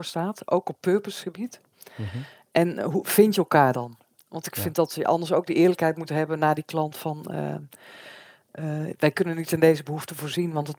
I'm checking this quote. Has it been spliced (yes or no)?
no